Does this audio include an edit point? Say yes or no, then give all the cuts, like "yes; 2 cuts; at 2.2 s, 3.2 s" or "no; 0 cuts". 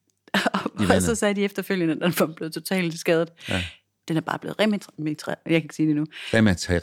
no; 0 cuts